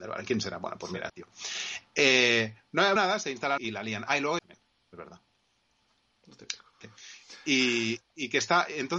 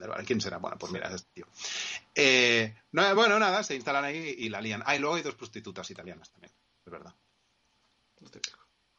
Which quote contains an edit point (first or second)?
first